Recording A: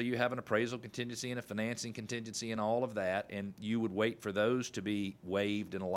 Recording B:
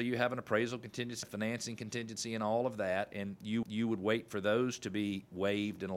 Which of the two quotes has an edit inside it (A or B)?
B